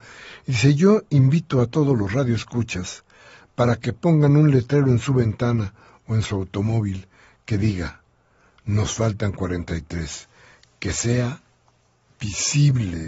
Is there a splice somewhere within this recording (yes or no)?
no